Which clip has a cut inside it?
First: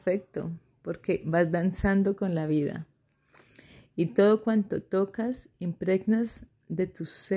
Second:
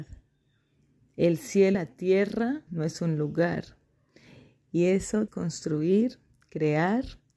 second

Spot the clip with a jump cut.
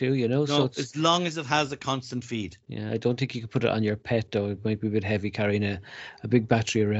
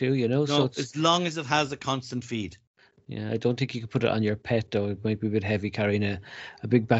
first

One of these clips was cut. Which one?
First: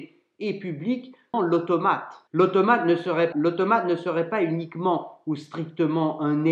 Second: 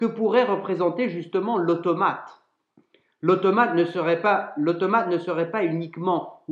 first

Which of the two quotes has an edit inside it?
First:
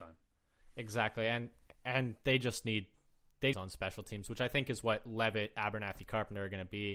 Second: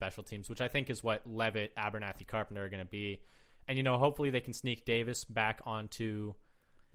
first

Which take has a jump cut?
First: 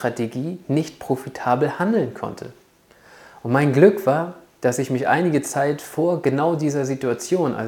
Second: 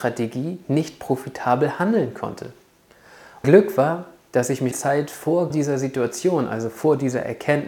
second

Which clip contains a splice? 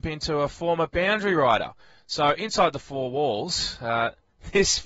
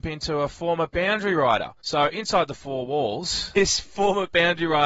second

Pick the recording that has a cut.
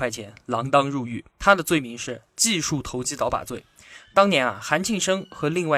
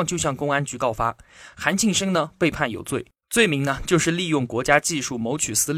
first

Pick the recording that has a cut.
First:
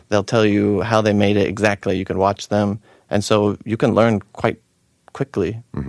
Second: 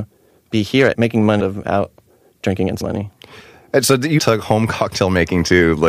second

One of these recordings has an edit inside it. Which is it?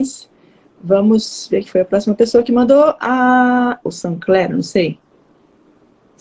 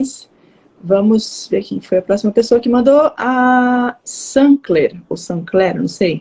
first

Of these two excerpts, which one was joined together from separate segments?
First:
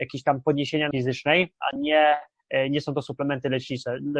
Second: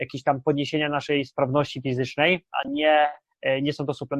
first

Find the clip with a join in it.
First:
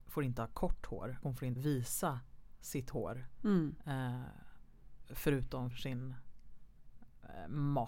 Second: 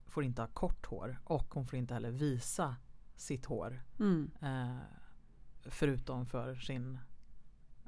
first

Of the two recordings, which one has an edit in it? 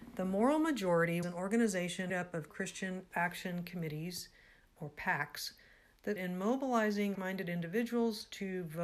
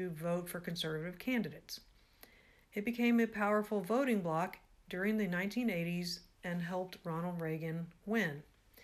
first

